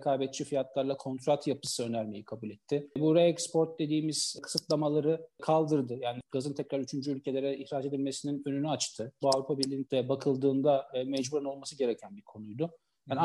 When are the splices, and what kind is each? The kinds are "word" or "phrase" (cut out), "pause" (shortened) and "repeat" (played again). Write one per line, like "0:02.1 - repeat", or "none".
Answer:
0:02.9 - pause
0:09.2 - word
0:09.8 - phrase

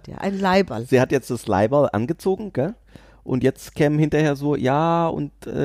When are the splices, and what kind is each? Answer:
none

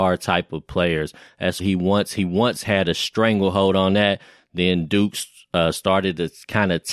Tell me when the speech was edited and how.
0:01.6 - word

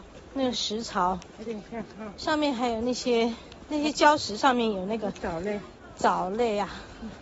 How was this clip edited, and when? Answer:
0:01.3 - word

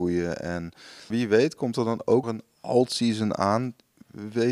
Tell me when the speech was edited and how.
0:01.1 - word
0:02.2 - word

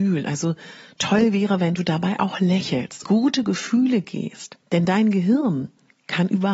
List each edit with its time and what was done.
0:03.0 - phrase
0:04.6 - pause

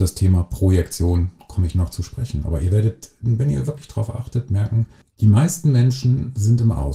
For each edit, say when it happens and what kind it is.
0:05.0 - pause

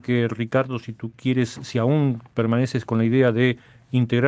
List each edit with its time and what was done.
0:02.3 - pause

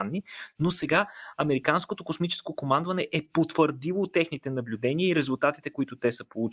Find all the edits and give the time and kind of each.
none

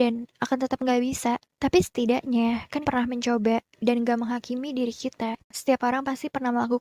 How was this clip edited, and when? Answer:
0:02.8 - word
0:03.7 - pause

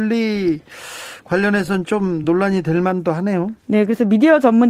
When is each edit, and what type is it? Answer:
none

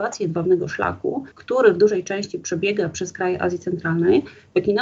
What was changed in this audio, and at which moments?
0:01.3 - pause

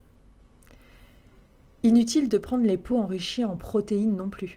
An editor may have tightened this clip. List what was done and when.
none

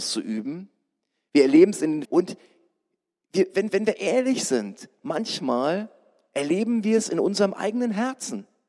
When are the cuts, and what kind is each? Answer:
0:02.0 - word
0:03.7 - repeat

